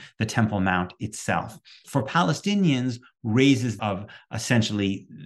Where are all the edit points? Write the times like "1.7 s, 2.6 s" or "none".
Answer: 1.8 s, 3.8 s